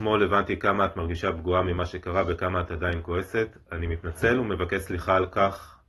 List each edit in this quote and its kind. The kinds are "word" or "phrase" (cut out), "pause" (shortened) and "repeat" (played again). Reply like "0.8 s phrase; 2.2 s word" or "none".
none